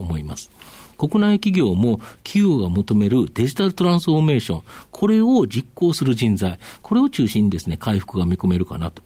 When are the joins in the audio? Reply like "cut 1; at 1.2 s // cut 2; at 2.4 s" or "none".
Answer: none